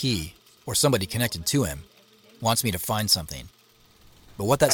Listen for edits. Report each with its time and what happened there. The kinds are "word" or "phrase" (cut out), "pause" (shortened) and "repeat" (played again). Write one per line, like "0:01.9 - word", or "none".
none